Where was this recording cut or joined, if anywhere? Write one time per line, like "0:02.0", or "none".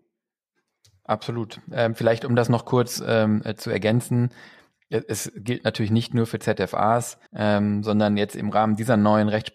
0:07.3